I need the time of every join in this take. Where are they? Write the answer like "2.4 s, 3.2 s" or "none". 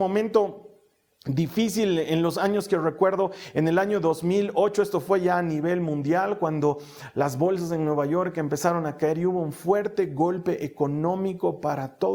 none